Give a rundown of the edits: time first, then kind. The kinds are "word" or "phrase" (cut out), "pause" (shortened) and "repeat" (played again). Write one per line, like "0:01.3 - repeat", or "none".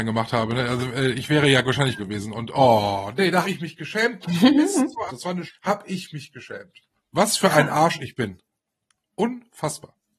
0:02.0 - word
0:03.4 - word
0:05.1 - word
0:05.5 - word